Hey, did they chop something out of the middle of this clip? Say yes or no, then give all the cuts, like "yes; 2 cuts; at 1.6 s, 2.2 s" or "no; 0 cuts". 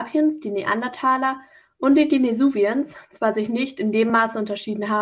no; 0 cuts